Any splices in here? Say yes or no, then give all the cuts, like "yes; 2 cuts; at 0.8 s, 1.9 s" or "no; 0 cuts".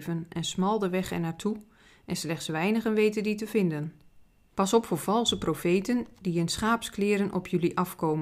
no; 0 cuts